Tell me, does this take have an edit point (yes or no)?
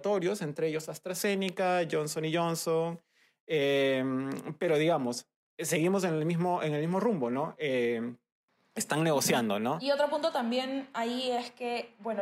no